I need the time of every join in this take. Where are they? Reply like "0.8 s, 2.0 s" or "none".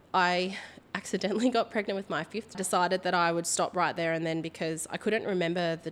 2.5 s